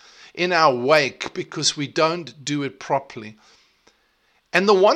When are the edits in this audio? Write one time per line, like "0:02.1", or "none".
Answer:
none